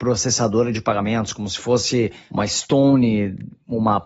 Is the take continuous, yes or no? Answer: yes